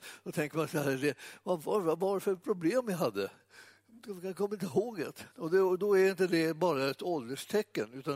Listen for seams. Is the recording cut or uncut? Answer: cut